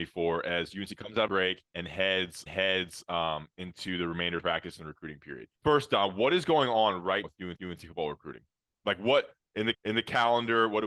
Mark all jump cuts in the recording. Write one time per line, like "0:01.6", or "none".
0:01.3
0:01.7
0:02.5
0:04.4
0:05.6
0:07.2
0:07.6
0:09.7